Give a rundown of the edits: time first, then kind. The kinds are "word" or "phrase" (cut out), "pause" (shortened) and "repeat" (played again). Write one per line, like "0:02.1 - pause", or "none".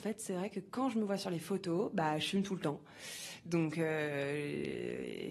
none

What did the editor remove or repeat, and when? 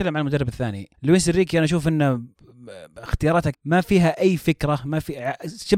0:00.9 - pause
0:03.5 - word

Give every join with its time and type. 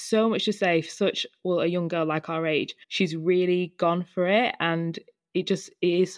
0:02.8 - pause

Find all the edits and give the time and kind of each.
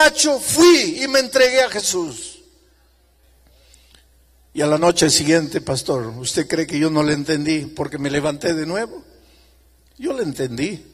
none

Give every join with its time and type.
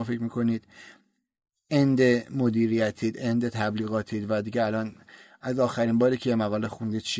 none

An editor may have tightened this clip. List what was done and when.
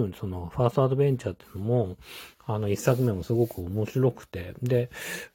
0:02.3 - pause

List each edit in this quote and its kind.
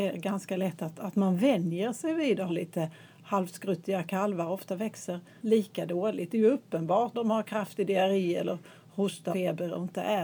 0:02.5 - word
0:05.4 - word
0:07.1 - word
0:09.3 - word

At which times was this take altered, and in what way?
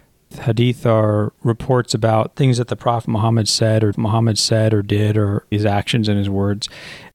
0:02.3 - word
0:03.9 - repeat
0:05.5 - word

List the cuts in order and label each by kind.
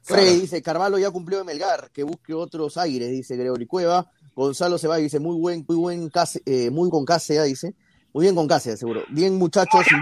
0:05.7 - word
0:06.9 - word

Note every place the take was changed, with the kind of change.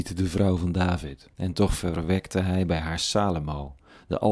0:01.3 - pause

